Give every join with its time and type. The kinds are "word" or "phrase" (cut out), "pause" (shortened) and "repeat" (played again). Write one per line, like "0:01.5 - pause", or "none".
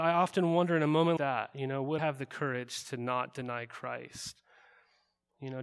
0:01.2 - word
0:02.0 - word